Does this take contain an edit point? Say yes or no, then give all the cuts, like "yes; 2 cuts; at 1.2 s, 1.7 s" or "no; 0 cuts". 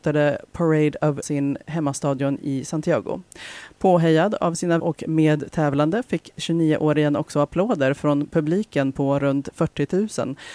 yes; 2 cuts; at 1.2 s, 4.8 s